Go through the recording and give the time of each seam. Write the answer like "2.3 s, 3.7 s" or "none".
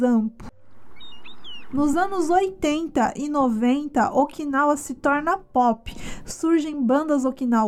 none